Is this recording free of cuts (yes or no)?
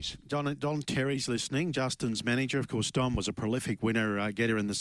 yes